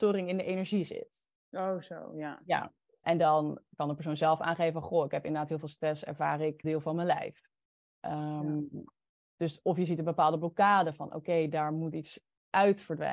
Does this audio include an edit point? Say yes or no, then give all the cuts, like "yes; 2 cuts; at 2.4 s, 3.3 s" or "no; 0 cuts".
yes; 2 cuts; at 3.0 s, 6.6 s